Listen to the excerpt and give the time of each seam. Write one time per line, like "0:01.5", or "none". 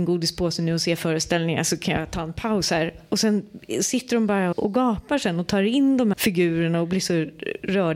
0:04.5
0:06.1